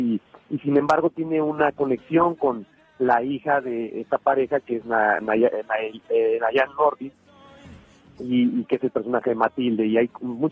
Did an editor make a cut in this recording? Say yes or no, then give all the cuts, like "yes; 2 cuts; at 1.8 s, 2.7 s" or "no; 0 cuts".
no; 0 cuts